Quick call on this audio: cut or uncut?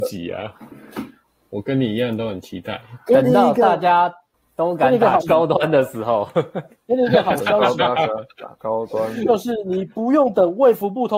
cut